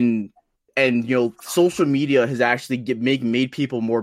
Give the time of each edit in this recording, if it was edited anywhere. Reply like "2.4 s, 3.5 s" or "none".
none